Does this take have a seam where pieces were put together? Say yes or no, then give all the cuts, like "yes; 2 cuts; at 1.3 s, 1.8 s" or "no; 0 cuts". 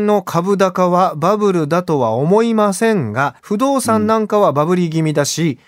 yes; 1 cut; at 3.4 s